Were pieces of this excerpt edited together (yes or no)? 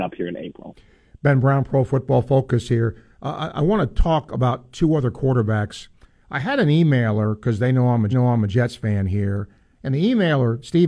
yes